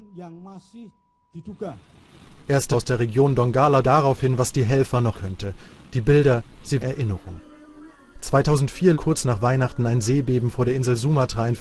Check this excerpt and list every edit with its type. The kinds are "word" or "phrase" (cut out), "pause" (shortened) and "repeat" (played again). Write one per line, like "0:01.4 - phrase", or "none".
0:02.7 - word
0:03.8 - word
0:05.1 - word
0:06.8 - word
0:08.9 - word